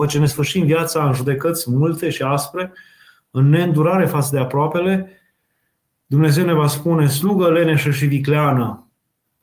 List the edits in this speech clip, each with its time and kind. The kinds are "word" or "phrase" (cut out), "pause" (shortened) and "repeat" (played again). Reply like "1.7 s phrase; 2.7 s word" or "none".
none

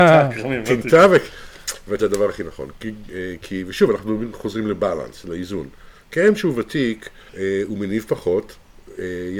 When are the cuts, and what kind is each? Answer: 2.0 s phrase; 6.0 s pause; 7.3 s pause

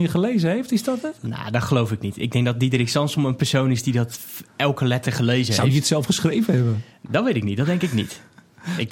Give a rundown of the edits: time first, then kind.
none

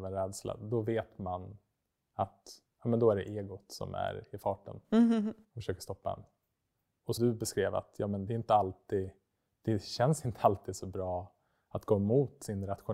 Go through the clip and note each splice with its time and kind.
2.7 s pause; 7.2 s word

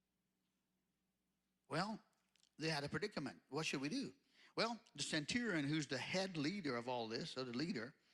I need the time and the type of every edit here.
none

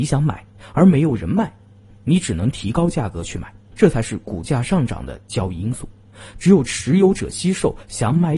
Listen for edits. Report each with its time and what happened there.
none

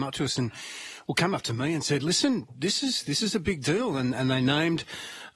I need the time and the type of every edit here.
none

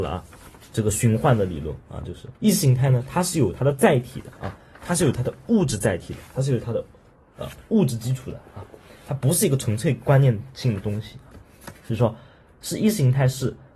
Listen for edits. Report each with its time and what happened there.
2.4 s pause

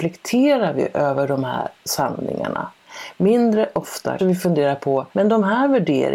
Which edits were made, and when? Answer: 4.2 s word; 5.1 s pause

